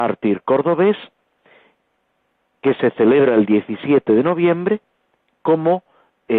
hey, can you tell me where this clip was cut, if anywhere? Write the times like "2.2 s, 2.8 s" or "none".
none